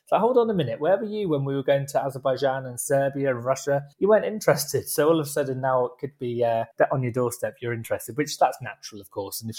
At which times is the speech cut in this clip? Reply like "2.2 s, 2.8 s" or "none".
3.9 s, 6.7 s